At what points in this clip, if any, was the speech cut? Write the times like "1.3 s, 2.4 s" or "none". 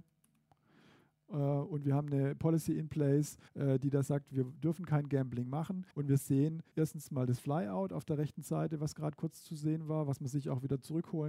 3.5 s, 5.9 s, 6.7 s